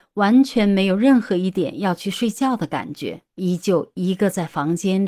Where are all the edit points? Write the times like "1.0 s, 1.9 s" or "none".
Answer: 3.3 s